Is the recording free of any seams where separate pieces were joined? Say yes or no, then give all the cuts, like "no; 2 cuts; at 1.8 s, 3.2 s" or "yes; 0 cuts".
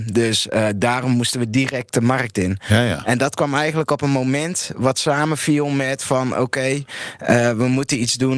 yes; 0 cuts